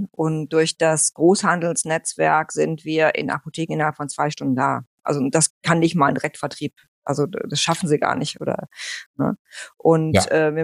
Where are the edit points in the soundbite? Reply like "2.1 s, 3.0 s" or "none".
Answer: 5.5 s